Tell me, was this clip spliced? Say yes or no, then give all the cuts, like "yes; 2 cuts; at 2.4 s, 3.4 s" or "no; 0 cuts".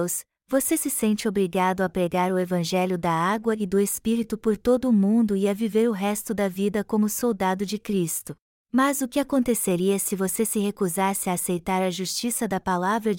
yes; 1 cut; at 8.4 s